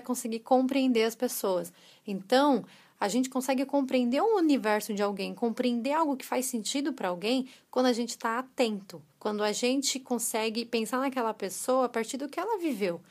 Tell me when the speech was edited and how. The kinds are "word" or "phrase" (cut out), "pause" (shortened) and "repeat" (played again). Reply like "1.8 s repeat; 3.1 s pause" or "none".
9.1 s pause